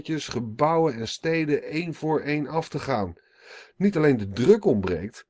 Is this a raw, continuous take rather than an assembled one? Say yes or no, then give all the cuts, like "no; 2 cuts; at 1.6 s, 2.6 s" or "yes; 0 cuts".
yes; 0 cuts